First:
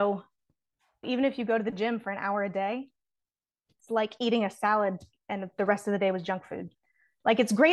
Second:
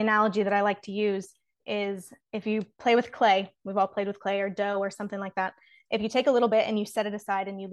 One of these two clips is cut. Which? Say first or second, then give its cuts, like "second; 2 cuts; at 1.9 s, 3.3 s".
first; 1 cut; at 1.0 s